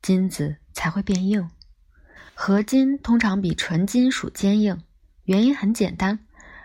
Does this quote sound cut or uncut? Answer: cut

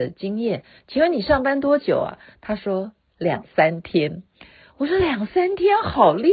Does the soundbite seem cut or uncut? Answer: uncut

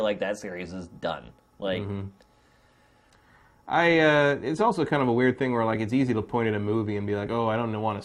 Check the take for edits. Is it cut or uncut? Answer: uncut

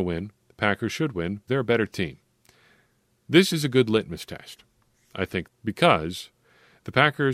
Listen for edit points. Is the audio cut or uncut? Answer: cut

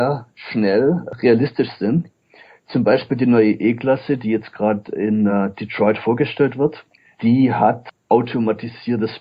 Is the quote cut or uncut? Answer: uncut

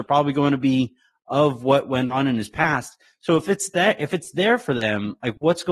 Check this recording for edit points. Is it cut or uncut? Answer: uncut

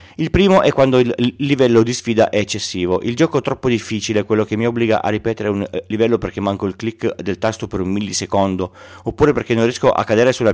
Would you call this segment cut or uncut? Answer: uncut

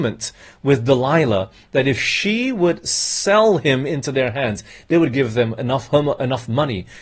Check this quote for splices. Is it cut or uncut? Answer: uncut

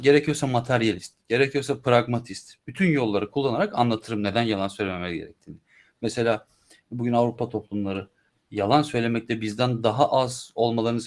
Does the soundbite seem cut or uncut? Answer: uncut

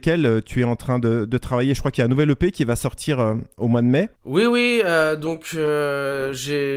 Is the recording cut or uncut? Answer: uncut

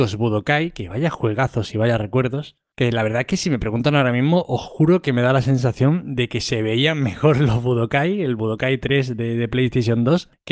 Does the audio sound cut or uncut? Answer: uncut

